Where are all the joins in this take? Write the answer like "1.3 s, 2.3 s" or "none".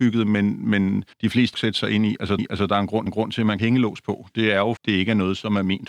1.1 s, 1.5 s, 2.4 s, 3.1 s, 3.6 s, 4.8 s